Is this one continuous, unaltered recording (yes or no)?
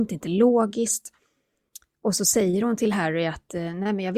yes